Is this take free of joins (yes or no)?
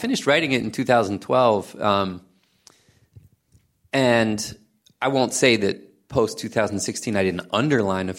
yes